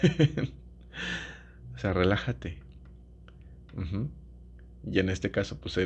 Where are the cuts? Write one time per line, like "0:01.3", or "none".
none